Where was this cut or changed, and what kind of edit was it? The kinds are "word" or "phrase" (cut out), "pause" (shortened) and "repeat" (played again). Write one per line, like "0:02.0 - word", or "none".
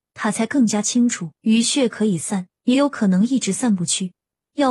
0:01.4 - pause
0:02.6 - pause